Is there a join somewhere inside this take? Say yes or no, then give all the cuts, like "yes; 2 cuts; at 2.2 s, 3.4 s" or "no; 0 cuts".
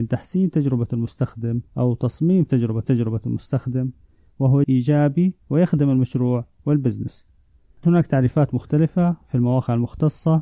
yes; 5 cuts; at 1.7 s, 2.8 s, 4.6 s, 5.4 s, 7.8 s